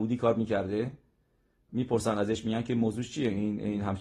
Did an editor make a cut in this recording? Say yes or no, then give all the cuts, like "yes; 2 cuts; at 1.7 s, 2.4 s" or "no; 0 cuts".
yes; 1 cut; at 1.7 s